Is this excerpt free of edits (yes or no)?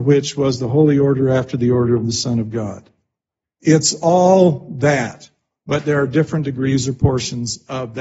yes